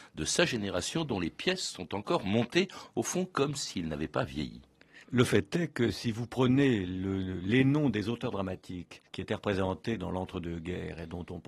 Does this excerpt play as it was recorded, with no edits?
no; 2 cuts; at 5.0 s, 9.1 s

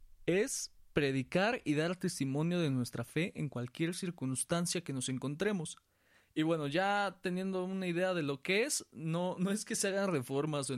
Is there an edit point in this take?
no; 0 cuts

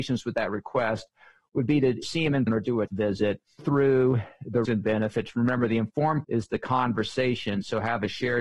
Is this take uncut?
no; 6 cuts; at 2.0 s, 2.5 s, 2.9 s, 3.6 s, 4.6 s, 6.2 s

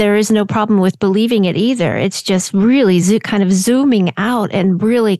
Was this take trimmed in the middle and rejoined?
no; 0 cuts

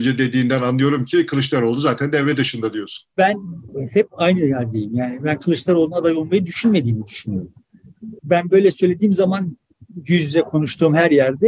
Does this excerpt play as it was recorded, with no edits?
no; 2 cuts; at 3.1 s, 8.2 s

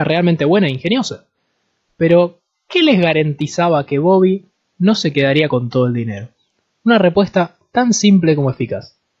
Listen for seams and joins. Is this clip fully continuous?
yes; 0 cuts

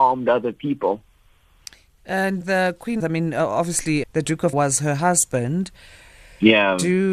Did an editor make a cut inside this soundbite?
yes; 4 cuts; at 2.4 s, 3.0 s, 4.0 s, 4.5 s

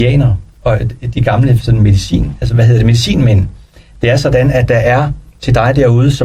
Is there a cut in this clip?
no; 0 cuts

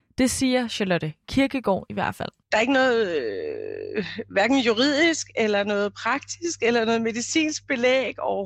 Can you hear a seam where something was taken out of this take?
yes; 1 cut; at 2.4 s

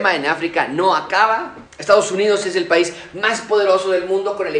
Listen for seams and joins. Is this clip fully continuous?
no; 1 cut; at 1.7 s

